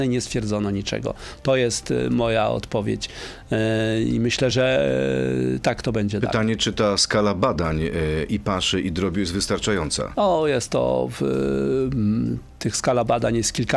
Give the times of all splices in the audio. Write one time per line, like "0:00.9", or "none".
none